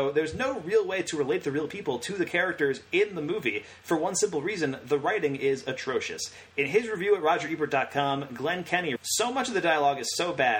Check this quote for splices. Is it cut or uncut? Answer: cut